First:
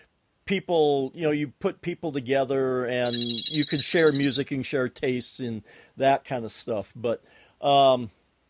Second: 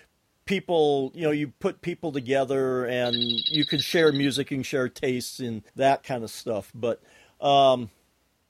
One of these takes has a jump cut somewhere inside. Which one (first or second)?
second